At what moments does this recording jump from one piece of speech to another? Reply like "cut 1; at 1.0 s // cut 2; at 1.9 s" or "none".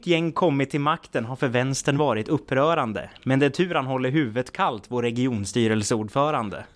none